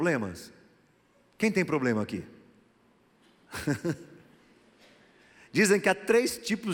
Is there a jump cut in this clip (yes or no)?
no